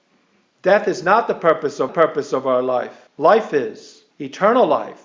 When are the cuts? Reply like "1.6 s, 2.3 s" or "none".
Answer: 1.9 s, 3.1 s, 4.1 s